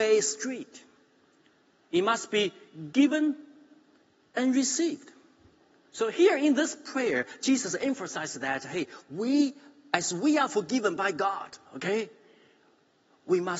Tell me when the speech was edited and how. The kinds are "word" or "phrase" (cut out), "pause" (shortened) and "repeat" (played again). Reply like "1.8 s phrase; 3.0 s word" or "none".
11.7 s pause